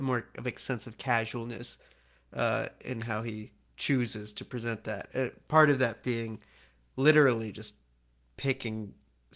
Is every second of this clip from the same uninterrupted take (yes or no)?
yes